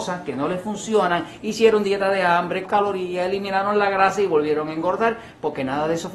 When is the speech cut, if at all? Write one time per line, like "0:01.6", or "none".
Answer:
0:02.7